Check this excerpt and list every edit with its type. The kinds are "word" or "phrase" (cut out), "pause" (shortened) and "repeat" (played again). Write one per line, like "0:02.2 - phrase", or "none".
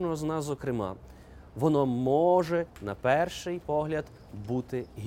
0:02.7 - pause